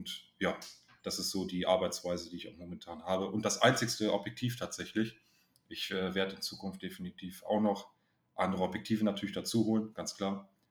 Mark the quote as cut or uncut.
uncut